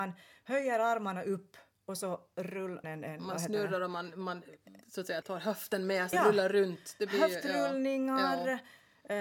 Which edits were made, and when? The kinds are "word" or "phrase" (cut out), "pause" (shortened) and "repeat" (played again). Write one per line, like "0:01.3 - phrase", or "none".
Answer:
0:02.8 - phrase
0:05.2 - word
0:06.1 - word